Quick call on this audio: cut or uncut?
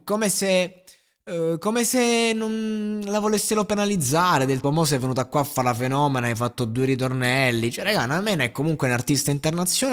cut